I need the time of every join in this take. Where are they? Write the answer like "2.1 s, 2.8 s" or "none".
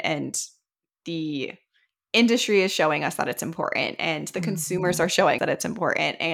5.4 s